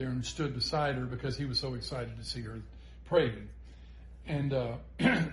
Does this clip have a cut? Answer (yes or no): no